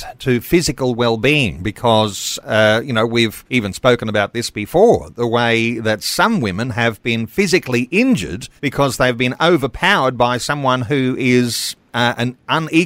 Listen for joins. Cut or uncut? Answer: cut